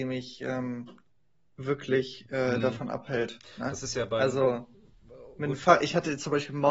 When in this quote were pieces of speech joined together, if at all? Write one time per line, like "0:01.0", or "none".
none